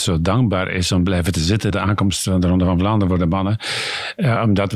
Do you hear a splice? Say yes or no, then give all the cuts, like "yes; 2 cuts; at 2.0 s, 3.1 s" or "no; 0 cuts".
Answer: yes; 1 cut; at 1.7 s